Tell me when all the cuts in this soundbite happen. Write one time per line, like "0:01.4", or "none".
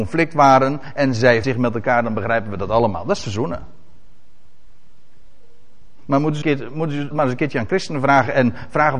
0:01.4
0:06.4
0:07.1

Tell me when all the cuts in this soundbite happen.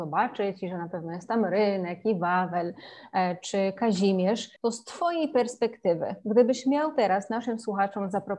0:04.6

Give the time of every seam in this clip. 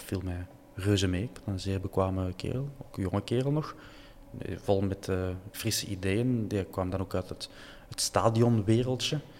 none

